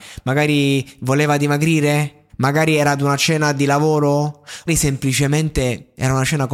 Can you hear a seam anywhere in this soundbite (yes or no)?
yes